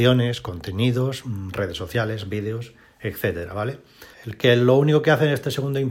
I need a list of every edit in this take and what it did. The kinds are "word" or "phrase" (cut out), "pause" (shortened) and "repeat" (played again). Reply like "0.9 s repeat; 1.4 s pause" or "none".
4.1 s pause